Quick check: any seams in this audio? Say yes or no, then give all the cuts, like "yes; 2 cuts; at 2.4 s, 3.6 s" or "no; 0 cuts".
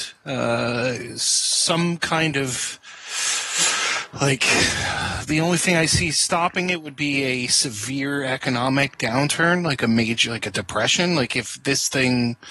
no; 0 cuts